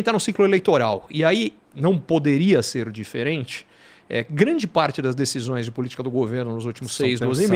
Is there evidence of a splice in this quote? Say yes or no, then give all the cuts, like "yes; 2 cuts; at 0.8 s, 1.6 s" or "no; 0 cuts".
yes; 1 cut; at 6.0 s